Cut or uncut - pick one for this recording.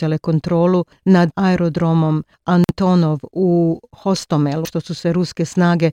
cut